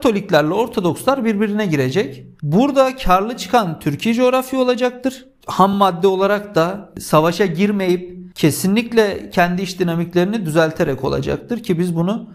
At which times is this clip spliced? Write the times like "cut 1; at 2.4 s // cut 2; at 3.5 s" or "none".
none